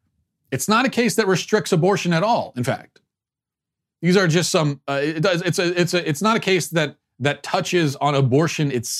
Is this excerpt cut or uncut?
uncut